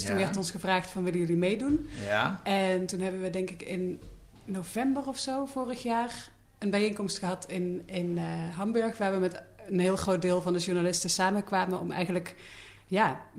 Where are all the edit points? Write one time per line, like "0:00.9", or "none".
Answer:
none

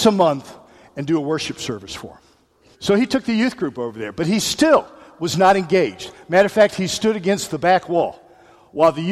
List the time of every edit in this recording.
0:02.7

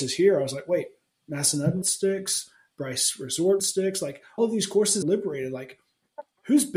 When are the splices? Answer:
0:01.8
0:03.6
0:04.4
0:05.0

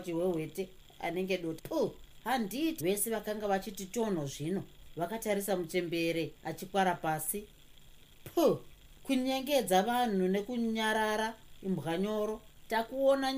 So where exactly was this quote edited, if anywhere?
0:01.6
0:02.8

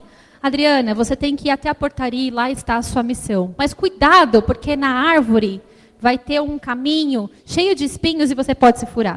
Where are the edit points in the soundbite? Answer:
none

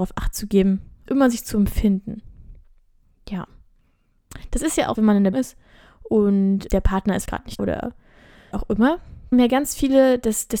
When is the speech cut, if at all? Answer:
0:01.1
0:04.9
0:05.3
0:06.7
0:07.2
0:07.6
0:08.5
0:09.3

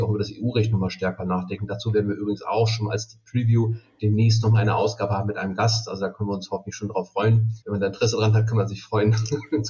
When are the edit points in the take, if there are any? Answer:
0:07.6

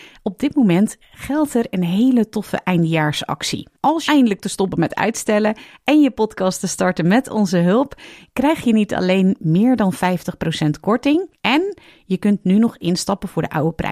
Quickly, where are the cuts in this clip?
0:03.8
0:04.1

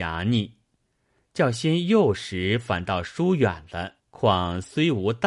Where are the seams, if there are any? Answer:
0:04.0

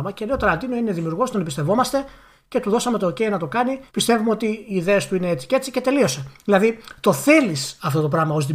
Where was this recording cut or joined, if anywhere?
0:03.9

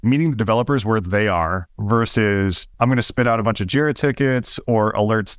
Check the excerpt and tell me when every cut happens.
0:02.7

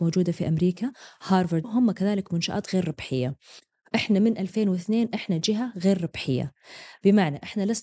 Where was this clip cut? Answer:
0:01.6

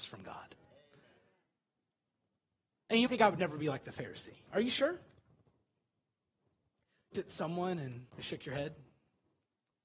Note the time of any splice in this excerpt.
0:03.1
0:04.5
0:07.1
0:08.1

